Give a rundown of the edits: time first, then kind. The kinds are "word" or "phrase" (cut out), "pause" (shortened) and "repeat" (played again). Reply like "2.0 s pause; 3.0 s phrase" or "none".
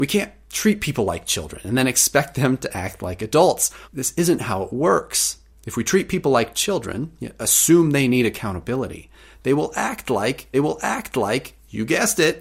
3.8 s pause; 5.5 s pause; 10.5 s repeat